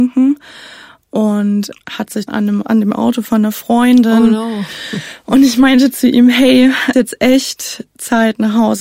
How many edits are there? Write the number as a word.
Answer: four